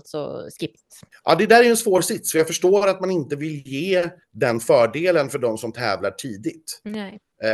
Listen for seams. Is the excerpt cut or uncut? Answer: cut